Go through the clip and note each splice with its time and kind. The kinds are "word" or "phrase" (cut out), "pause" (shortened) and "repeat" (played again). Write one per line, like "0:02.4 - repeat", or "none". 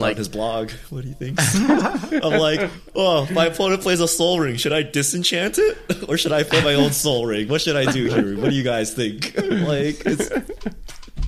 none